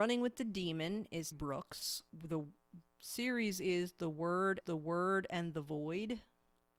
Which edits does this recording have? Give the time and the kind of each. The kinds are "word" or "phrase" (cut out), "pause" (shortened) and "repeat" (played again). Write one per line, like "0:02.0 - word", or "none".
0:01.3 - word
0:02.1 - pause
0:04.6 - repeat